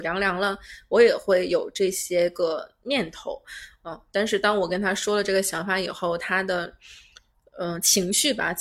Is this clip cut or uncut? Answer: uncut